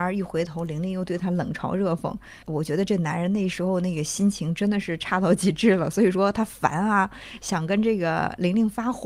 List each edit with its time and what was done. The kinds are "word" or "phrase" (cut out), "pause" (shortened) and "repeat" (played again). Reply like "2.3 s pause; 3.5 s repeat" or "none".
2.4 s pause